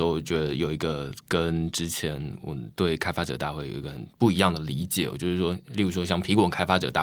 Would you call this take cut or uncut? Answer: cut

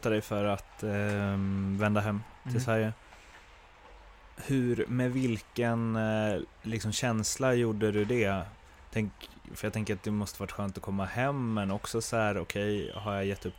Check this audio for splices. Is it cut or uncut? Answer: uncut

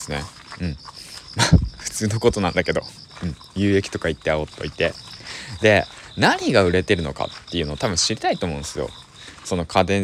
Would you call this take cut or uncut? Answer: uncut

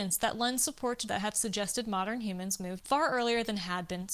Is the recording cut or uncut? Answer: cut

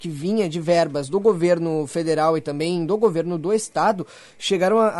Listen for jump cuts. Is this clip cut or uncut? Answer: uncut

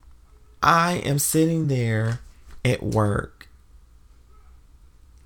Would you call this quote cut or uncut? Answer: uncut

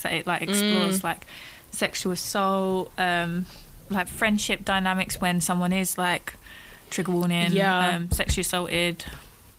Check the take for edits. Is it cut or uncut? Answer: uncut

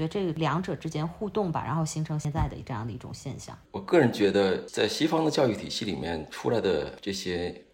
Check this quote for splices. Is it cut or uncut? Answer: cut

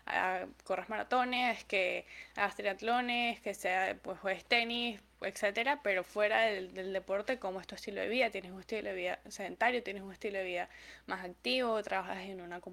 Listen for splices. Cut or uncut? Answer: uncut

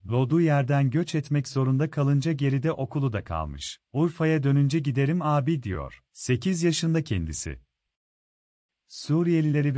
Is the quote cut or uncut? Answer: cut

